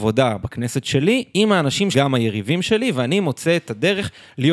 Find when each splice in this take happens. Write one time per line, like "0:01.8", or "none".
0:01.9